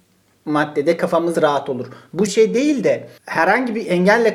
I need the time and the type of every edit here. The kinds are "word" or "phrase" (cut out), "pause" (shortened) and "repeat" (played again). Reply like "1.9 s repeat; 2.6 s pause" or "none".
1.3 s word; 2.3 s word; 3.2 s pause